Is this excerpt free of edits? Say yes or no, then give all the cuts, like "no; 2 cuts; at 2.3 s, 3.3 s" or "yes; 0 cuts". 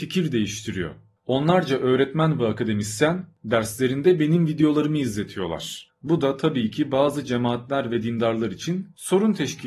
yes; 0 cuts